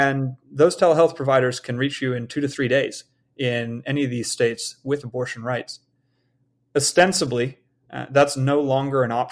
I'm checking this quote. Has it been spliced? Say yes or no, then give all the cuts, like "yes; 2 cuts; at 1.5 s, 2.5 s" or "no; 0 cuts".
no; 0 cuts